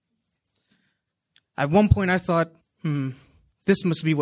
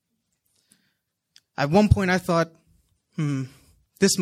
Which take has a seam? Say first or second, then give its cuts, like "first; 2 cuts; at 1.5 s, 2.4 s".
first; 1 cut; at 2.6 s